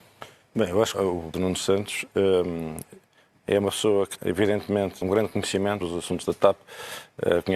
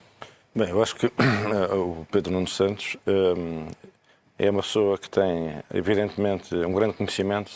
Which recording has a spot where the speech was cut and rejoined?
first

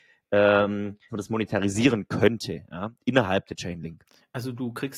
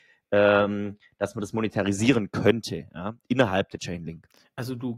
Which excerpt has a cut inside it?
first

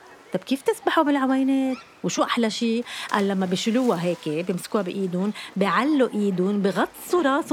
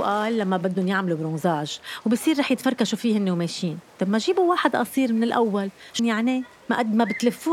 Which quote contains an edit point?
second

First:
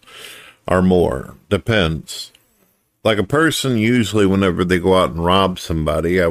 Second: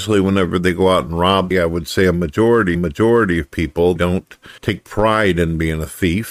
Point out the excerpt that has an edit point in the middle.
second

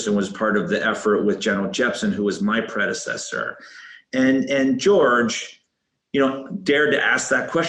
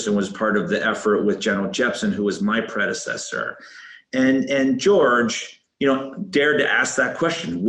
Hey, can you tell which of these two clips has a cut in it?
second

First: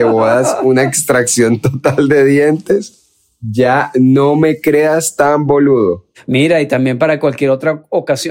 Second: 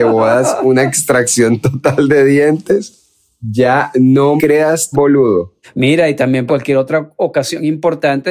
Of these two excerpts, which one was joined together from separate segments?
second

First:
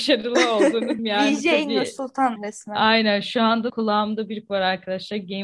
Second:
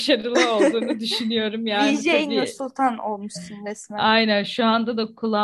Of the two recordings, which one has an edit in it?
first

